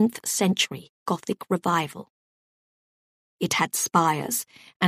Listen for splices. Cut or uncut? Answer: uncut